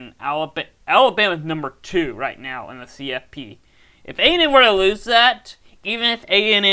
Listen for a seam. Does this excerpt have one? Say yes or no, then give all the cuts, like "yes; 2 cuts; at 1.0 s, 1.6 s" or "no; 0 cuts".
no; 0 cuts